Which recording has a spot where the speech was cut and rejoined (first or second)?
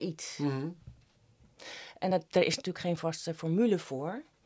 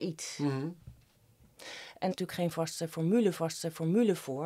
second